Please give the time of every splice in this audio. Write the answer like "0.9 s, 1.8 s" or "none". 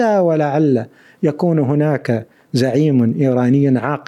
none